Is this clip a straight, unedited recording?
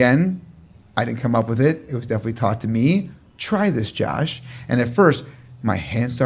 yes; 0 cuts

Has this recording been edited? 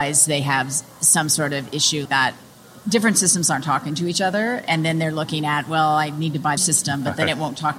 yes; 2 cuts; at 2.1 s, 6.6 s

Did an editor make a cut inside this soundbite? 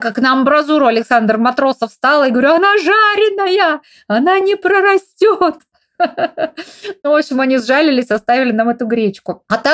no; 0 cuts

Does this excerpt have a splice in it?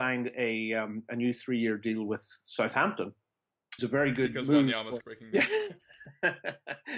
yes; 2 cuts; at 3.8 s, 5.0 s

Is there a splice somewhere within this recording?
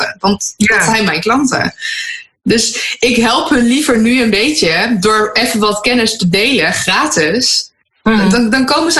no; 0 cuts

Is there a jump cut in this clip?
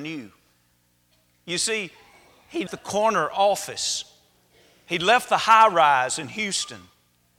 yes; 1 cut; at 2.7 s

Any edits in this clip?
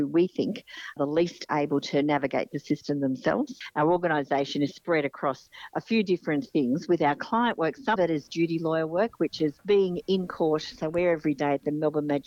yes; 2 cuts; at 1.0 s, 8.0 s

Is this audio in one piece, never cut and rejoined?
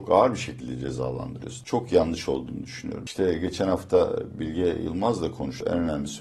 yes; 0 cuts

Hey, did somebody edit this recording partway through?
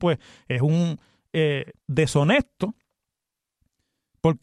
yes; 1 cut; at 1.8 s

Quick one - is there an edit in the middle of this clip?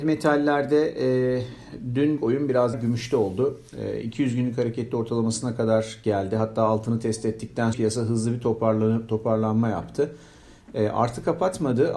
yes; 3 cuts; at 2.2 s, 2.7 s, 7.7 s

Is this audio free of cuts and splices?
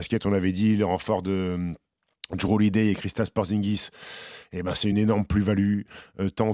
yes; 0 cuts

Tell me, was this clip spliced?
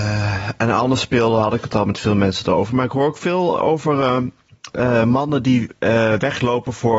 no; 0 cuts

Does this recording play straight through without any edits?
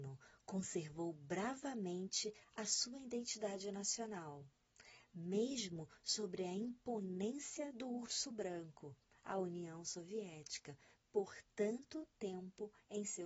yes; 0 cuts

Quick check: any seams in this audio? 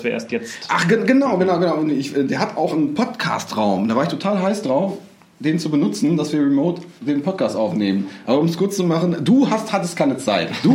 yes; 1 cut; at 7.0 s

